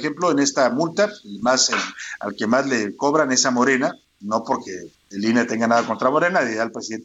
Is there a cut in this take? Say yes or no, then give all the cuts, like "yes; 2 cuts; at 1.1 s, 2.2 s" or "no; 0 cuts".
no; 0 cuts